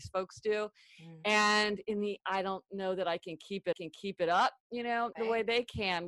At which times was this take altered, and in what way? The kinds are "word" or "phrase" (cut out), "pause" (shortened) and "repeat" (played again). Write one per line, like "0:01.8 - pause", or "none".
0:02.2 - word
0:03.7 - repeat
0:05.1 - word